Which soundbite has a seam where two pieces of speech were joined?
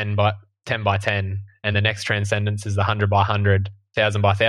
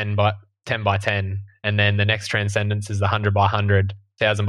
first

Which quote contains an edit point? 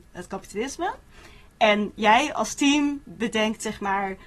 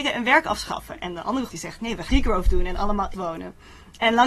second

